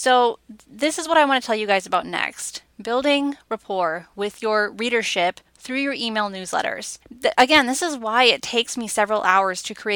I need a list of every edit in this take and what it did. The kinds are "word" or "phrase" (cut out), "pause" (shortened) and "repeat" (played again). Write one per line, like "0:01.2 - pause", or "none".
0:07.0 - pause